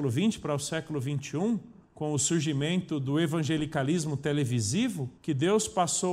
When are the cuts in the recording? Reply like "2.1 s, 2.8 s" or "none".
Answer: 1.8 s, 5.2 s